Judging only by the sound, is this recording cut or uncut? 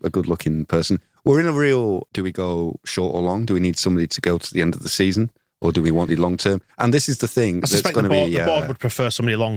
cut